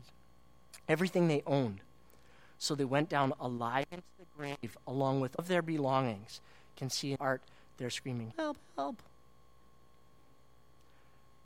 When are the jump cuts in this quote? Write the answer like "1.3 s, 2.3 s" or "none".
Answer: 5.4 s, 7.2 s, 8.3 s

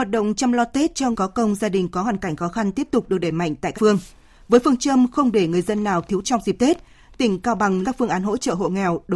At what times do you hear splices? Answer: 1.1 s, 3.7 s, 6.2 s, 7.8 s

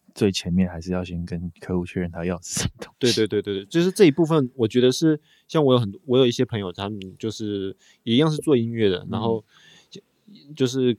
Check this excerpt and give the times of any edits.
none

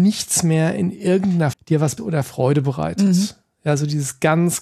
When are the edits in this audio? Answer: 1.5 s, 2.0 s

